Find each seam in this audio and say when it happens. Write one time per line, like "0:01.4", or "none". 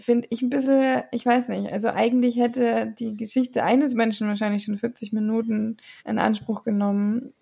0:06.0